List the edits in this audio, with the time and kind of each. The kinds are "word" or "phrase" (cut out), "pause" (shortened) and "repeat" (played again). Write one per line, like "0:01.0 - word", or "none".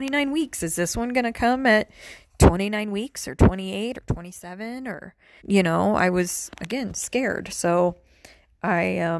0:05.4 - word